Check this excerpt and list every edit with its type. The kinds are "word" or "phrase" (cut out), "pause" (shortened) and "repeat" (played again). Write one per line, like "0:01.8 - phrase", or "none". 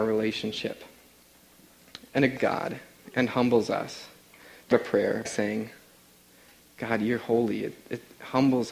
0:02.4 - word
0:04.7 - word
0:05.2 - word